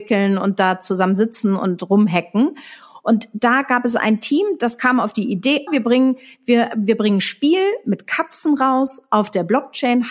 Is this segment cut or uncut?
cut